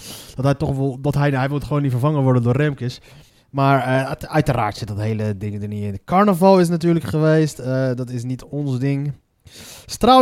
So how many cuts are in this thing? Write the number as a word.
one